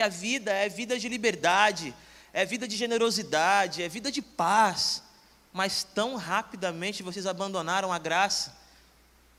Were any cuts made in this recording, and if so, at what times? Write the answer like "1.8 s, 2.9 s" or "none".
none

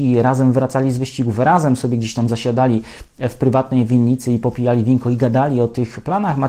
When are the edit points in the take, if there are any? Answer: none

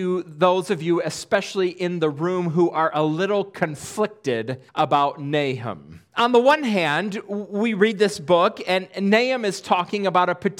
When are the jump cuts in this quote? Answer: 4.7 s, 6.1 s

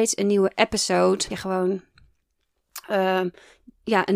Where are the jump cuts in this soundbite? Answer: 1.3 s

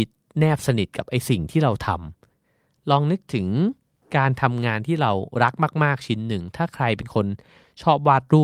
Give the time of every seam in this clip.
none

